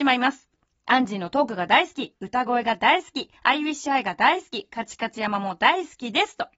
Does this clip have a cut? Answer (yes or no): yes